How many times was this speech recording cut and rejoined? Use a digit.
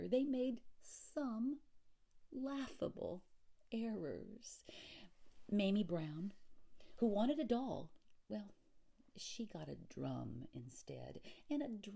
0